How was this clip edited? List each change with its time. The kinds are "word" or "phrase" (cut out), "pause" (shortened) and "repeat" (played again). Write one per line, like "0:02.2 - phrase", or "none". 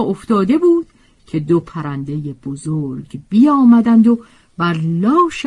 none